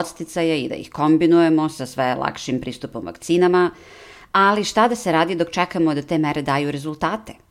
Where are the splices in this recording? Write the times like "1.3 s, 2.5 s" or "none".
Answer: none